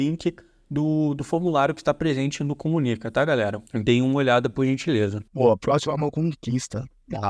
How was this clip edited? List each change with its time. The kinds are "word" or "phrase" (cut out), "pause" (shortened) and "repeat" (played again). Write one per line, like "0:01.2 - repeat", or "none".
0:03.7 - pause
0:05.3 - pause